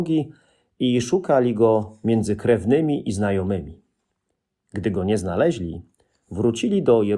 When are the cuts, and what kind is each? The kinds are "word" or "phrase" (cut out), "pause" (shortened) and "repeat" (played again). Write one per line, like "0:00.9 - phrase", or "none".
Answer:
none